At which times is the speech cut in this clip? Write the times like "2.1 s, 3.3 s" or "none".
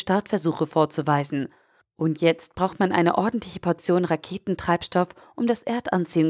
none